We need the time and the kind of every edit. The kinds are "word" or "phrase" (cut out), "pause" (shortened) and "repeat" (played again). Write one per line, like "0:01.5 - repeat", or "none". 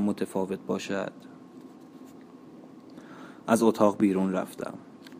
none

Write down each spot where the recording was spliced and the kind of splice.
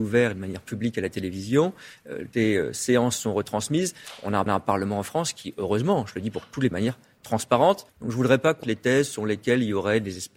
0:02.3 - word
0:04.5 - repeat
0:06.7 - phrase
0:07.9 - pause
0:08.6 - word

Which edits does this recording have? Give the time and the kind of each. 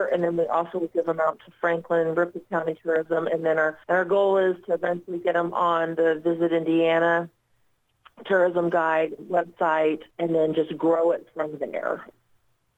0:03.8 - pause
0:09.2 - word
0:10.1 - pause

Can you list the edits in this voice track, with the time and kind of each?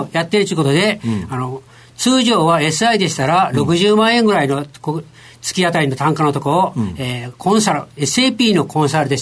none

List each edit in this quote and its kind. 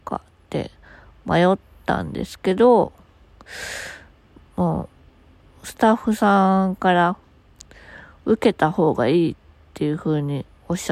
none

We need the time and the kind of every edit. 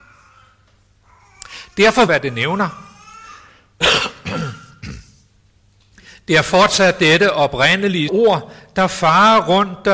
0:02.1 - phrase
0:08.1 - word

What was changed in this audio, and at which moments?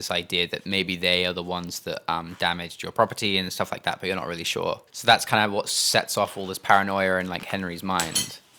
0:04.9 - pause

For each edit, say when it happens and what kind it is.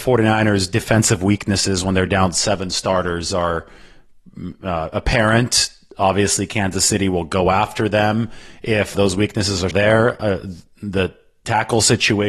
0:08.9 - word
0:09.7 - word

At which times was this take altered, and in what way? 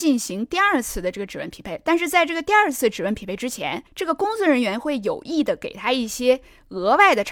0:03.9 - pause

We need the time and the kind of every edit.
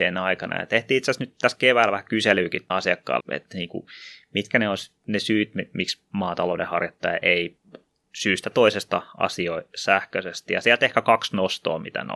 0:02.7 - word
0:03.2 - word
0:08.5 - word

